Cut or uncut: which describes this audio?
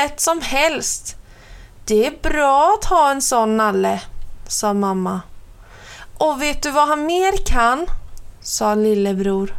uncut